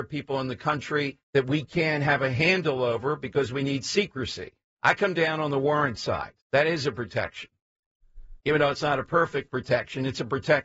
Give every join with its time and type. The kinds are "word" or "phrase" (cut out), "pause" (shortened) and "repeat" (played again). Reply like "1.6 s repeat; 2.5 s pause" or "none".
1.2 s pause; 4.7 s pause; 6.4 s pause; 8.4 s pause